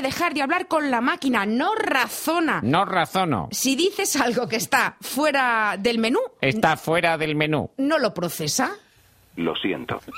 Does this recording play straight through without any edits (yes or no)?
yes